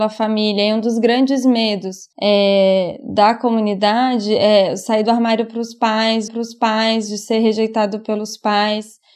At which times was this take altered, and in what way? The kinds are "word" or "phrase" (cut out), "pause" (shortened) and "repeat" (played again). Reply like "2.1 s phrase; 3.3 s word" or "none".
2.1 s pause; 6.3 s repeat

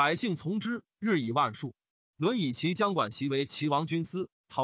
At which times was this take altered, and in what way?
none

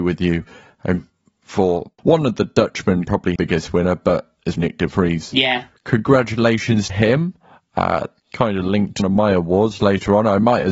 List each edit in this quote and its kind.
1.0 s word; 2.0 s word; 3.1 s word; 3.4 s word; 4.6 s word; 6.9 s word; 8.2 s word; 9.0 s word

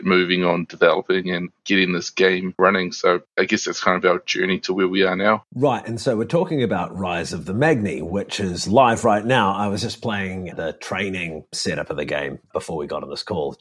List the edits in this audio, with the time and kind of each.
3.3 s pause; 5.5 s pause; 12.4 s pause

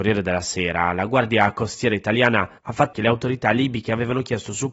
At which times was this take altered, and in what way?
2.6 s pause; 2.9 s word

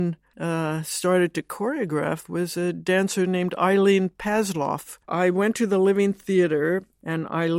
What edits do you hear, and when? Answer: 5.0 s pause

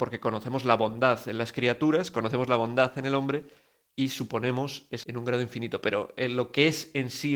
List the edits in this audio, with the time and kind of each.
5.0 s word

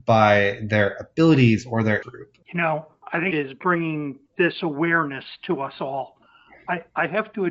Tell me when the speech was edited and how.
2.0 s word; 2.4 s pause; 3.3 s phrase

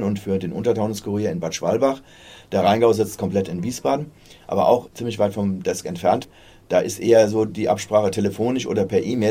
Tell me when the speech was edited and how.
none

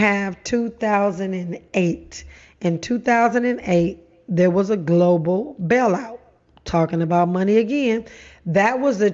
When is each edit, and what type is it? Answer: none

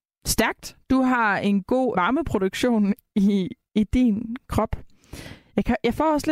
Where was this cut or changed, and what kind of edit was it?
1.9 s word

